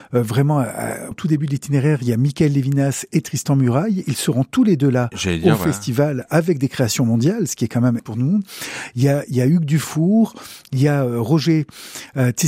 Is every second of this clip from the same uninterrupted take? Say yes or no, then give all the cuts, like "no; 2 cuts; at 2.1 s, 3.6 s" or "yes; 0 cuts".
no; 2 cuts; at 1.1 s, 8.0 s